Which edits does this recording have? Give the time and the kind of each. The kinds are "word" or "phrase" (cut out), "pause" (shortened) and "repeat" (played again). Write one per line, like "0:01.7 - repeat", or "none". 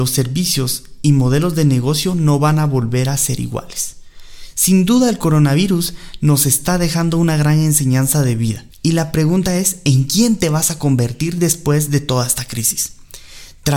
none

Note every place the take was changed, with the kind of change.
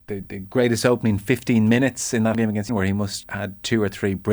0:02.3 - word
0:02.7 - word
0:03.2 - word

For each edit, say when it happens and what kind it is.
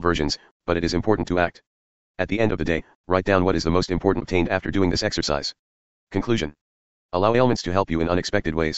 0:04.2 - word

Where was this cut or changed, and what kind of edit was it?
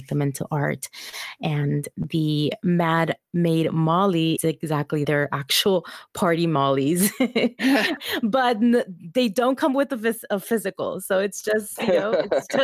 0:04.4 - word
0:05.0 - word
0:08.0 - word

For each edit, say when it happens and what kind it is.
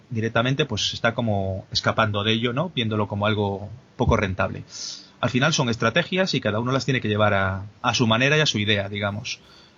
0:07.8 - pause

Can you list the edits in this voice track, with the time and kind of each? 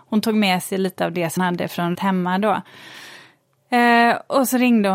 0:01.4 - word
0:01.9 - word

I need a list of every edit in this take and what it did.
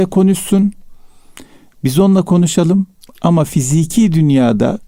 none

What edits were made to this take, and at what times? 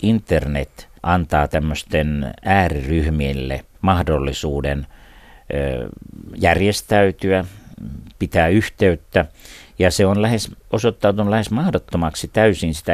0:01.0 - pause
0:03.7 - pause

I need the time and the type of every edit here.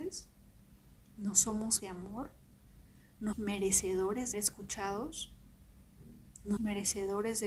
0:01.8 - word
0:03.3 - word
0:04.3 - word
0:06.6 - word

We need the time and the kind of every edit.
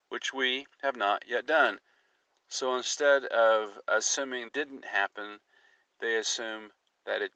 0:04.5 - phrase

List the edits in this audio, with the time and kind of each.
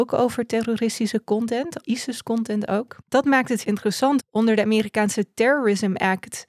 0:01.8 - phrase
0:03.0 - pause
0:03.6 - word
0:04.2 - word

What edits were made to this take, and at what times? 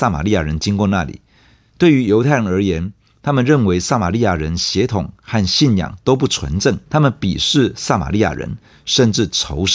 0:06.9 - pause

